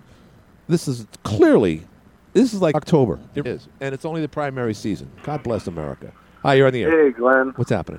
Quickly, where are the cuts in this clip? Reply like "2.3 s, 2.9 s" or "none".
2.7 s, 3.4 s